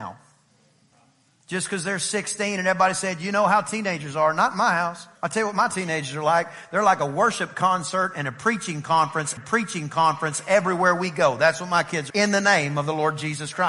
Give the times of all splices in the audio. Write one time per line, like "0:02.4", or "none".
0:00.9
0:05.2
0:09.4
0:12.1